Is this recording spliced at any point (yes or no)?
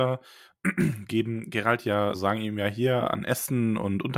yes